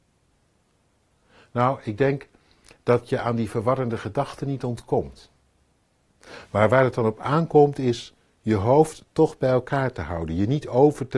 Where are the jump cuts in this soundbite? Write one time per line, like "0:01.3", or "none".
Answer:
none